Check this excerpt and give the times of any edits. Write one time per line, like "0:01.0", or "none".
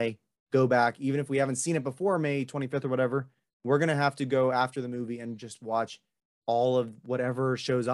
none